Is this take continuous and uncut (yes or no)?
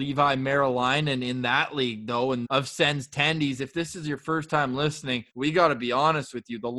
no